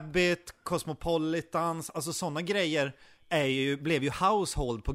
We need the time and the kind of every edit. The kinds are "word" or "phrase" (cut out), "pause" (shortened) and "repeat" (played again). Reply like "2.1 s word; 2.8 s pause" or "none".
none